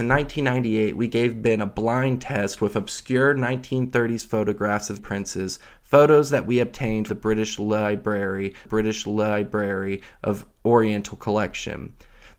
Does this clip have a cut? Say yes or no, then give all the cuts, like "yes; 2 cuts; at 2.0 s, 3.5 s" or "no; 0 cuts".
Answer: yes; 3 cuts; at 5.0 s, 7.1 s, 8.7 s